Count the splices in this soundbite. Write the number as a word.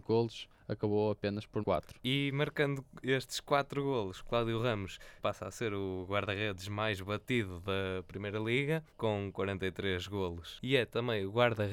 three